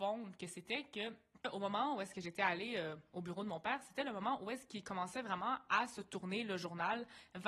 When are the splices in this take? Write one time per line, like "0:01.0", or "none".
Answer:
none